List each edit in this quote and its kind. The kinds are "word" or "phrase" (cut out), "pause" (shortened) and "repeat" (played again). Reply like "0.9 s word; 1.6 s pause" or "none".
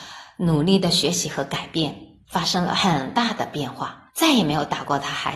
2.2 s pause; 4.1 s pause